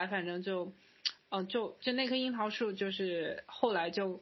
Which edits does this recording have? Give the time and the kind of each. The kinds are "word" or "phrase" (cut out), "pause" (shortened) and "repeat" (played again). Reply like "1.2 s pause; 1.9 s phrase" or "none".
none